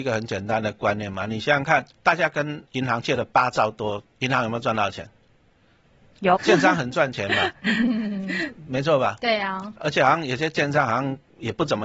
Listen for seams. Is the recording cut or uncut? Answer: cut